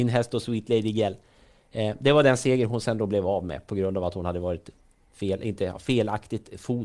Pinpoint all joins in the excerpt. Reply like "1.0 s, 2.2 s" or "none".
none